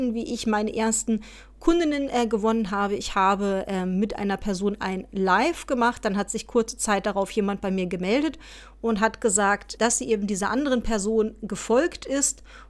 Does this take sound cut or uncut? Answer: cut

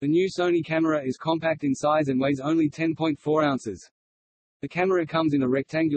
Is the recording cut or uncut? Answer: uncut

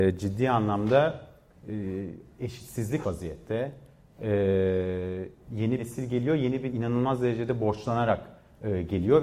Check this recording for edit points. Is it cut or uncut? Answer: cut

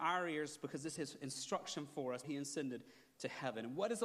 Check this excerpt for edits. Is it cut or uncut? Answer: cut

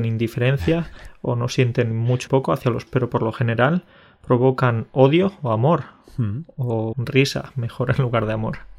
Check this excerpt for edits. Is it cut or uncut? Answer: cut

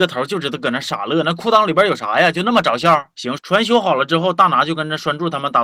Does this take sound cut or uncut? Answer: cut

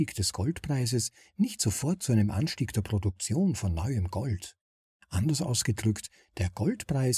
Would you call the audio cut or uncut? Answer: uncut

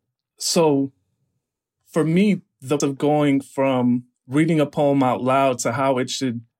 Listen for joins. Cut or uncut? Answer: cut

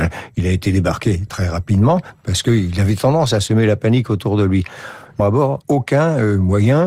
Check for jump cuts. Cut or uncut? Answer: cut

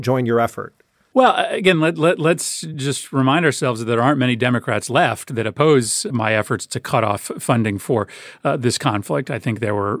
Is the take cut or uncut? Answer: uncut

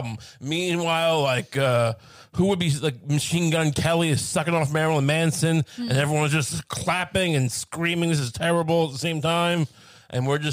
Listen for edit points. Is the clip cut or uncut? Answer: uncut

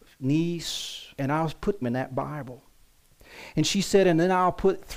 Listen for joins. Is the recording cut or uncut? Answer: cut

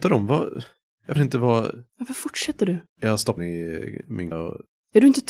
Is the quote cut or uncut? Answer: cut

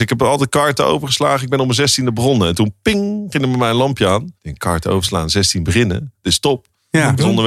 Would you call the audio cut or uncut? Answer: cut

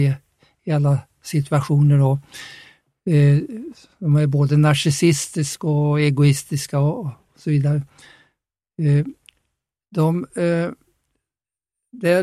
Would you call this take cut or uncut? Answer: uncut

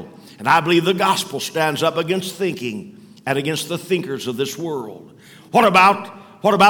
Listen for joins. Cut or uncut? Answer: uncut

